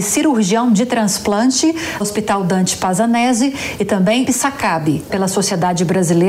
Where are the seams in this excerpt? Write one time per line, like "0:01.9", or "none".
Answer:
0:02.0
0:04.3
0:05.1